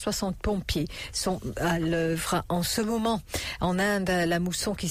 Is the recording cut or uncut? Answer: uncut